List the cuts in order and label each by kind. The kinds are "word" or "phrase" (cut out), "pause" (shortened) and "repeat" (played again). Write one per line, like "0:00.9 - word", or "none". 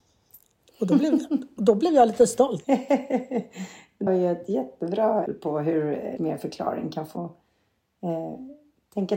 0:04.1 - word
0:05.3 - word
0:06.2 - word
0:07.2 - word